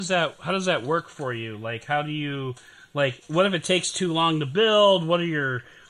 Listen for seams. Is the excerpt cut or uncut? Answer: uncut